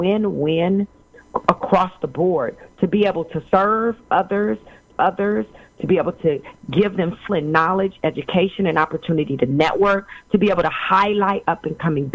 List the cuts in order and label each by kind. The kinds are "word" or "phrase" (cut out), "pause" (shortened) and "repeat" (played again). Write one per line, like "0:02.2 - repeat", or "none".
0:03.5 - pause
0:04.9 - repeat
0:07.3 - word